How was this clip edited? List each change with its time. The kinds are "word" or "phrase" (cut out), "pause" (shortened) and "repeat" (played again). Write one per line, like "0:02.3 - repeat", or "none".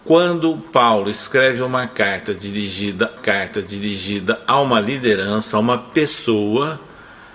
0:03.2 - repeat